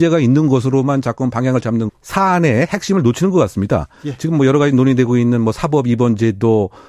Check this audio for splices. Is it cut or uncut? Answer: cut